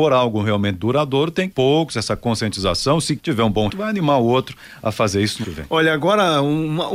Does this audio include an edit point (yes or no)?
yes